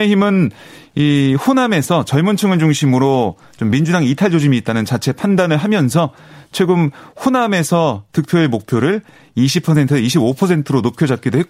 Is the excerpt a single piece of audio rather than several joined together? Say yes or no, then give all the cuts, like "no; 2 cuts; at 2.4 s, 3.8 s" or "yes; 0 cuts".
yes; 0 cuts